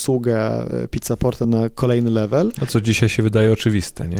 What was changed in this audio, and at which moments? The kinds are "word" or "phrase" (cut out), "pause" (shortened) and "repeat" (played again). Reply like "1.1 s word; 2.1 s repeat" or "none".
1.4 s word; 2.7 s word